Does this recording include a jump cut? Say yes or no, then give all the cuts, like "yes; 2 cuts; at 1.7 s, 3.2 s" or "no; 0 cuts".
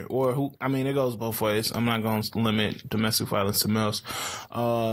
no; 0 cuts